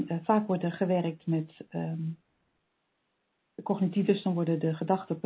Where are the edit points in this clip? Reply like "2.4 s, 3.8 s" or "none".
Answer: 4.1 s